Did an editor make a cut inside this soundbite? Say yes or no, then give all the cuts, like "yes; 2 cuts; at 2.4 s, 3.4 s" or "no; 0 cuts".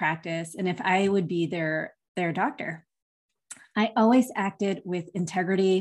no; 0 cuts